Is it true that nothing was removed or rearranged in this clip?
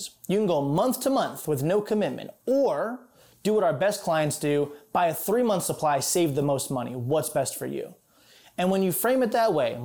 yes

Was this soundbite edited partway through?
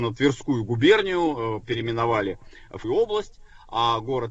yes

